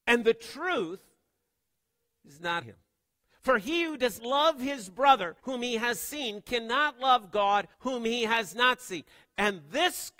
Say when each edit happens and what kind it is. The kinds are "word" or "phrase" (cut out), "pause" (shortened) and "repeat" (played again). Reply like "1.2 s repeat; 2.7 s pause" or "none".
2.6 s word; 4.2 s word; 5.4 s pause; 7.7 s pause